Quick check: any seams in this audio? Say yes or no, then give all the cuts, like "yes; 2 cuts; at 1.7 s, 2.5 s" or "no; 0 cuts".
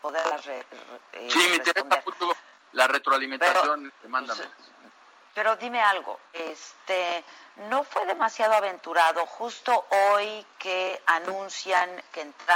yes; 1 cut; at 3.9 s